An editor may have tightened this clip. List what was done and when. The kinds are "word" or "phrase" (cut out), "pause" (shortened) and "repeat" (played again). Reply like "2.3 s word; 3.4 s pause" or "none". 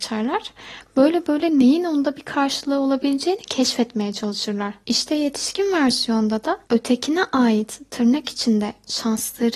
6.6 s pause